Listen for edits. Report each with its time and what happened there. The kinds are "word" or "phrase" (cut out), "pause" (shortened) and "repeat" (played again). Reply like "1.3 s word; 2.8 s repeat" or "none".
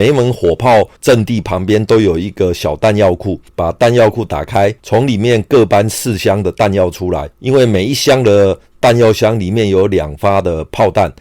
1.0 s pause; 3.5 s pause; 4.8 s pause; 7.3 s pause

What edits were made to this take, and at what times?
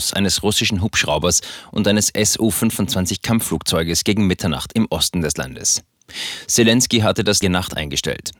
7.4 s phrase

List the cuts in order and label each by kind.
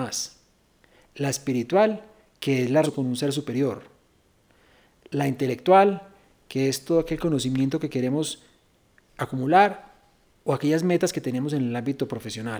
2.8 s phrase

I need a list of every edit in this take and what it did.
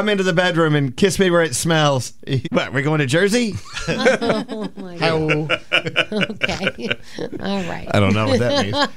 2.4 s word

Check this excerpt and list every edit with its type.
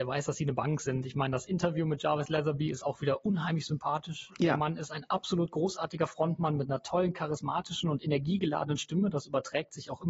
none

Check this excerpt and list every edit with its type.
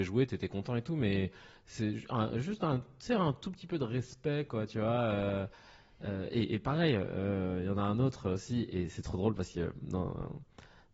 none

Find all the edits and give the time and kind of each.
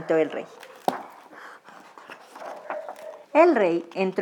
3.2 s pause

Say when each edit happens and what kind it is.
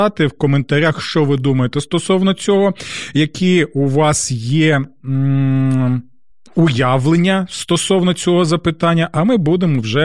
none

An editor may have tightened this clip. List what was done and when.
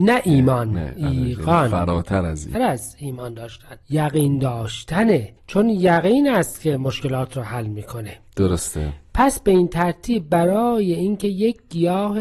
2.5 s word; 3.8 s pause; 5.4 s pause

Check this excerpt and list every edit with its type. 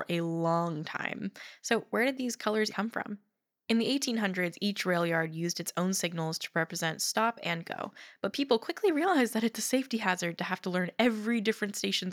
2.7 s word

